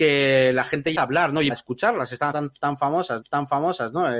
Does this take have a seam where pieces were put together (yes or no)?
yes